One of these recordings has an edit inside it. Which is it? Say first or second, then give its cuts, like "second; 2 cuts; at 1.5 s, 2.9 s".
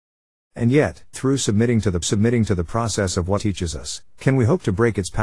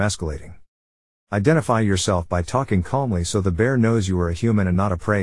first; 3 cuts; at 1.1 s, 2.0 s, 3.4 s